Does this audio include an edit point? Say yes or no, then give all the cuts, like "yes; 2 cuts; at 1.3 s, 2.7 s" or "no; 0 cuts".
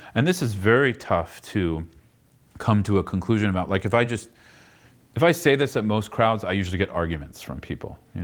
no; 0 cuts